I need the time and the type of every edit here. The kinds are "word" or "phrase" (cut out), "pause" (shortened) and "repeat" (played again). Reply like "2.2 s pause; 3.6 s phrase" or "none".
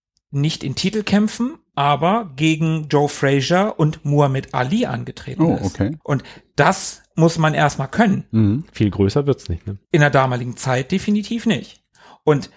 6.0 s pause; 9.8 s pause